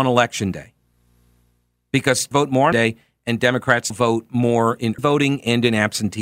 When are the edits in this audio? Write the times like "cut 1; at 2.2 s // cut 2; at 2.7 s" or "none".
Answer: cut 1; at 2.3 s // cut 2; at 2.7 s // cut 3; at 3.9 s // cut 4; at 5.0 s